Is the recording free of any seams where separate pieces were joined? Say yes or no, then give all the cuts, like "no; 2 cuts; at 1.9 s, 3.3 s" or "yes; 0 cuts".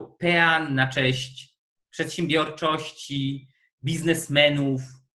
yes; 0 cuts